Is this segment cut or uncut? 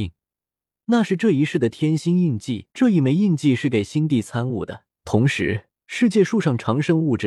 cut